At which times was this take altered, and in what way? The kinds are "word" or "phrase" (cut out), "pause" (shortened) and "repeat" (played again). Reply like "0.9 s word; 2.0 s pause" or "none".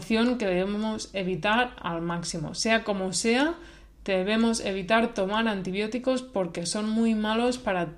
none